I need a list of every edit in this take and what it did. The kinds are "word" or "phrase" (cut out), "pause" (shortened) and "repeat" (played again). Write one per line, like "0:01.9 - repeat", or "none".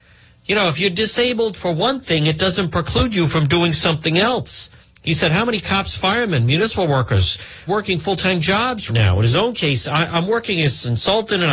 0:04.8 - pause
0:07.7 - word
0:08.9 - word